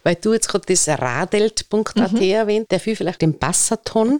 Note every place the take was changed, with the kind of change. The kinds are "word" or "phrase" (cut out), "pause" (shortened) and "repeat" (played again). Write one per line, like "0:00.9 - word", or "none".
0:02.7 - word
0:03.2 - phrase